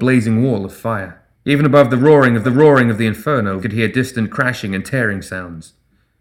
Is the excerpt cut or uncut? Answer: cut